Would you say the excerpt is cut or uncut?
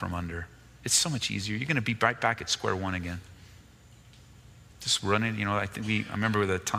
uncut